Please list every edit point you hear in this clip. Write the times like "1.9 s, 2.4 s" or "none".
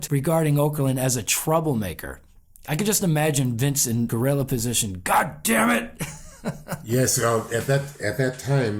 none